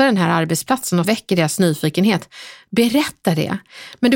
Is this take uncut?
no; 1 cut; at 1.0 s

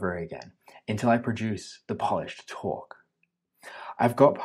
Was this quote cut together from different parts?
no; 0 cuts

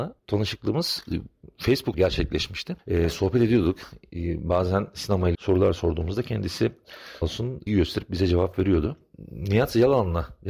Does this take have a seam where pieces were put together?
yes; 4 cuts; at 1.9 s, 5.3 s, 7.2 s, 7.7 s

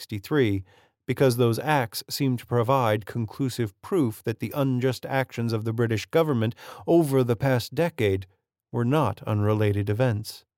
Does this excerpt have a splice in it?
no; 0 cuts

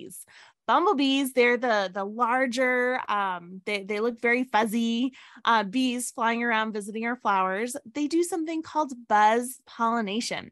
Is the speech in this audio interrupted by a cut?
no; 0 cuts

